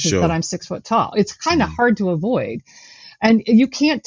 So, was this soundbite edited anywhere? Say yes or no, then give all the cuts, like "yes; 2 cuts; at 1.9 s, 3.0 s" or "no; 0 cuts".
no; 0 cuts